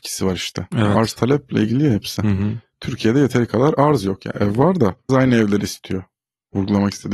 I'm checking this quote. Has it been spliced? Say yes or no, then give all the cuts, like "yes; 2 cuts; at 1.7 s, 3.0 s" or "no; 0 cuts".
yes; 1 cut; at 5.1 s